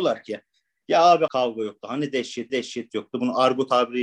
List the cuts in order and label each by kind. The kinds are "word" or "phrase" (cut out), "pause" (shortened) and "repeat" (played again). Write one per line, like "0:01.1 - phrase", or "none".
0:01.3 - word
0:02.5 - repeat